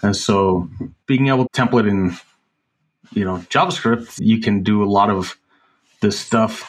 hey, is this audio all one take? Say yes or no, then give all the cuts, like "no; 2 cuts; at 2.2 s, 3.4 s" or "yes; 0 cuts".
no; 3 cuts; at 1.0 s, 1.5 s, 4.2 s